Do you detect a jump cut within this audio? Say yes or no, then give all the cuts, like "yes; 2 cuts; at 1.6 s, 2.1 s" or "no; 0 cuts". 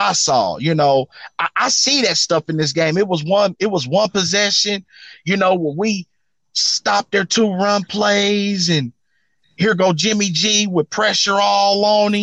no; 0 cuts